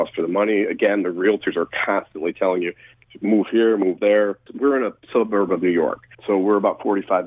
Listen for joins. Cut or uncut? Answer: cut